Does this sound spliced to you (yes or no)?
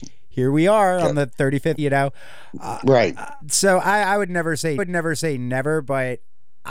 yes